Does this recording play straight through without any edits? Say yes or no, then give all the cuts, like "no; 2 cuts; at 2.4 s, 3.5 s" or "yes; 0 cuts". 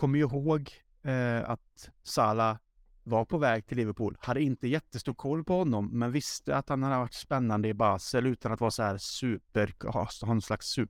yes; 0 cuts